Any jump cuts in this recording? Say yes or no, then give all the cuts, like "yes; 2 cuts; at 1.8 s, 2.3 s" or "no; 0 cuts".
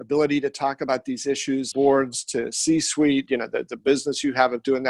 yes; 2 cuts; at 1.7 s, 3.3 s